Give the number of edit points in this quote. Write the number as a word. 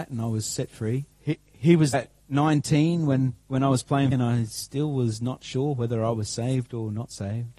four